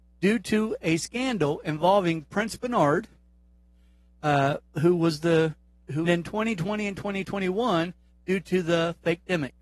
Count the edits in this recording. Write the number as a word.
one